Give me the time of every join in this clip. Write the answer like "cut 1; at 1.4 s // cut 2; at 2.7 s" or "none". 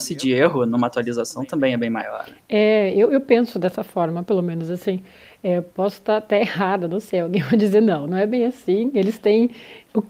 none